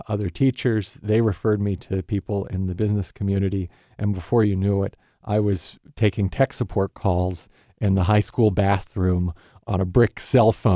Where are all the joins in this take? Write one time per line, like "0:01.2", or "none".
none